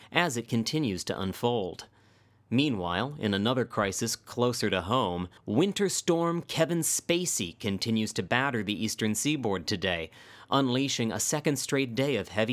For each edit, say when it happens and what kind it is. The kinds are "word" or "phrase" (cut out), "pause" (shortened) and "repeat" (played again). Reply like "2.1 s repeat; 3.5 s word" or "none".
5.4 s pause